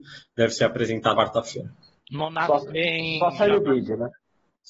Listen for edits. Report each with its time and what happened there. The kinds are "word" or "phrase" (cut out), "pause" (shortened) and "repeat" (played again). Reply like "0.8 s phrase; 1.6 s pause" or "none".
1.1 s word; 2.6 s word